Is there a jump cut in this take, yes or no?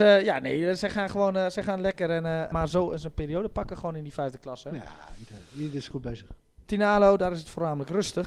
yes